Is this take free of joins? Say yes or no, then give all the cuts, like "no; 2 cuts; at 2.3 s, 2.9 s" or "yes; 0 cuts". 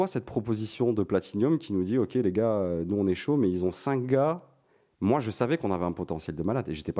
yes; 0 cuts